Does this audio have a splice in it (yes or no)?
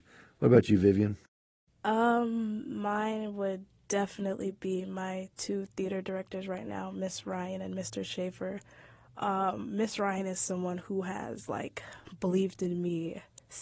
no